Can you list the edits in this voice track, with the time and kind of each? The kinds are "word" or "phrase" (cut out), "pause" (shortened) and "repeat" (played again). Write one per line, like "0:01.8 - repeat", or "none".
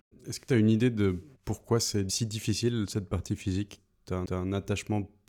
0:04.3 - repeat